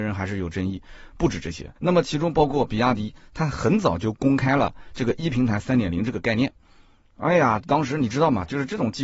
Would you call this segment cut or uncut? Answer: cut